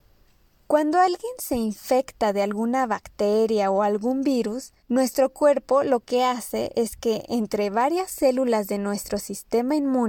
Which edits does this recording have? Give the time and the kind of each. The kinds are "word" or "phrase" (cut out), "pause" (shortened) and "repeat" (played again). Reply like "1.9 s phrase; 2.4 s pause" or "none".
4.8 s pause